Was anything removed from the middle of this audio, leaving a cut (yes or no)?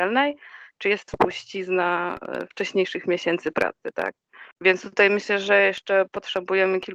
yes